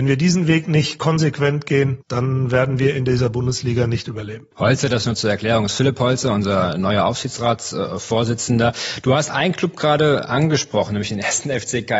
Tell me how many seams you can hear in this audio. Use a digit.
2